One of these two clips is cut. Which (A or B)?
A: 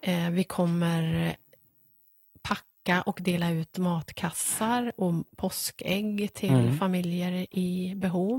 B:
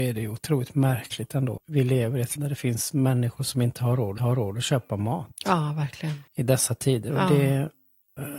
B